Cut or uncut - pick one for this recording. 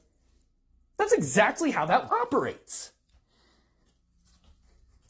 cut